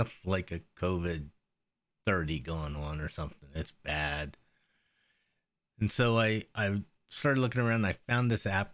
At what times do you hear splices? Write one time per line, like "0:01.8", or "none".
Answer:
none